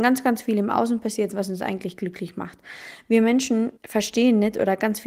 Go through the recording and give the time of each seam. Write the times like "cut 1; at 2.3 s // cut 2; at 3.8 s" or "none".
cut 1; at 3.8 s